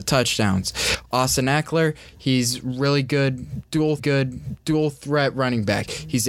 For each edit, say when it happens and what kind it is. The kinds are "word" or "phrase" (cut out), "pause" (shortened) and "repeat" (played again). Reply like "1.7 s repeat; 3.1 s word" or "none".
4.0 s repeat